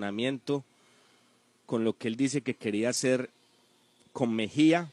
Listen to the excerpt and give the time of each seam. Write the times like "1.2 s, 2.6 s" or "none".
none